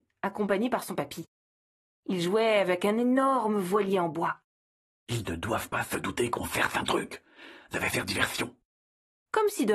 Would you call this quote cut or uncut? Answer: uncut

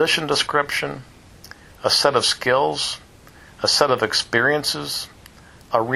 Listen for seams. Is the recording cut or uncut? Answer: uncut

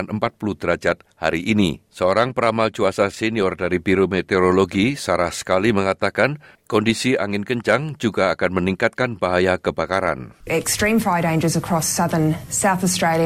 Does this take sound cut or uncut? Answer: cut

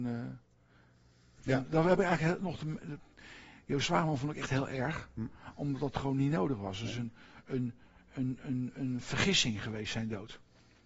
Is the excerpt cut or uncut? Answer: uncut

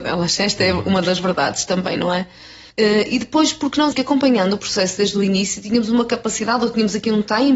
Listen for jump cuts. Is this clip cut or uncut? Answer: cut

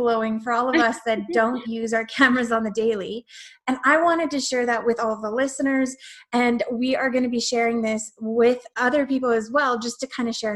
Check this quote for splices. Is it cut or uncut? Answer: uncut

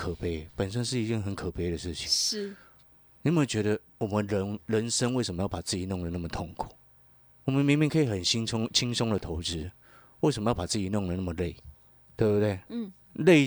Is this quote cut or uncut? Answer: uncut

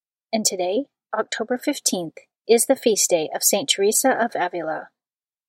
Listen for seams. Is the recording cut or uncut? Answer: uncut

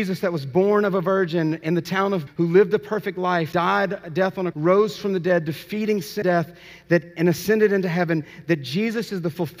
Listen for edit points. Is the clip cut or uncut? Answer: cut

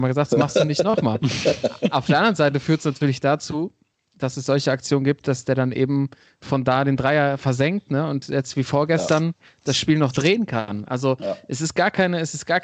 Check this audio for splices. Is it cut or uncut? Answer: uncut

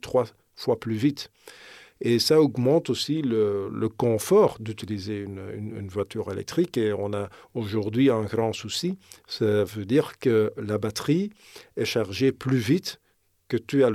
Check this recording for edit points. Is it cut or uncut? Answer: uncut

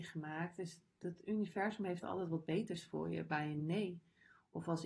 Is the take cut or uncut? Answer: uncut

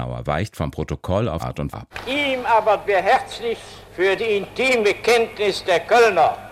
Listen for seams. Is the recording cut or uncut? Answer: cut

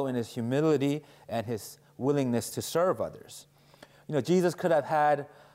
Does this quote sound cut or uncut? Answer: uncut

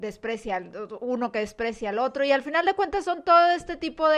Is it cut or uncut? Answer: uncut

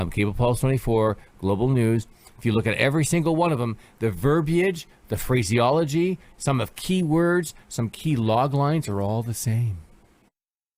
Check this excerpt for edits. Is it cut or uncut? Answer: uncut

